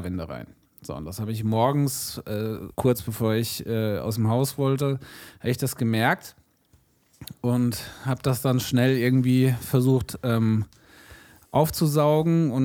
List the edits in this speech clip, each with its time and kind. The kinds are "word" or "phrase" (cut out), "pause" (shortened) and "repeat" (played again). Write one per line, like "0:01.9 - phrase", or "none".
0:02.7 - pause